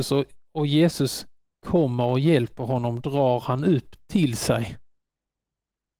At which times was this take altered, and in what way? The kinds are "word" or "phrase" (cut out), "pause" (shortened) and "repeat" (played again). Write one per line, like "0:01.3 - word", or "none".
none

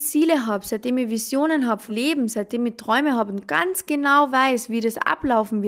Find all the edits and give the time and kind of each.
0:01.9 - word

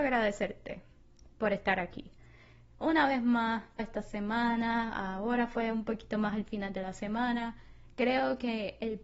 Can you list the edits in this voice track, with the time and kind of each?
0:03.8 - word

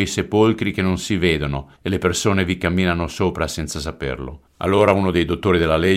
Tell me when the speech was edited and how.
0:01.8 - pause
0:04.5 - pause

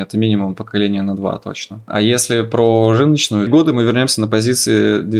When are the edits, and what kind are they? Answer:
0:03.5 - phrase

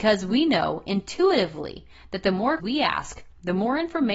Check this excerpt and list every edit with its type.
0:02.6 - word

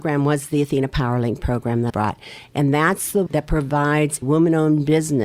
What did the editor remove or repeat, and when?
0:01.9 - word
0:03.3 - word
0:04.2 - word

